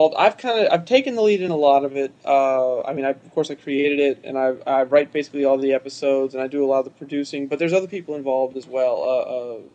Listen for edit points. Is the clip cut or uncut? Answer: uncut